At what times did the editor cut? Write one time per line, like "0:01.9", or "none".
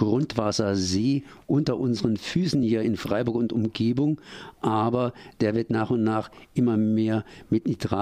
none